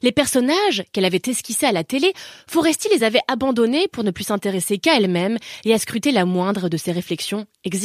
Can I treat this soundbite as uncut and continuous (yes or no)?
yes